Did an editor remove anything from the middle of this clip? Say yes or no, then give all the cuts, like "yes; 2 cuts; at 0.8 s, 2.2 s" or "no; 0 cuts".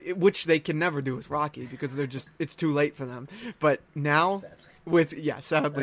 yes; 1 cut; at 3.9 s